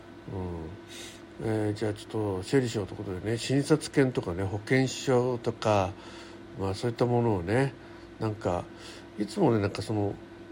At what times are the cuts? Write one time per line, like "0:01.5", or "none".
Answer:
0:01.3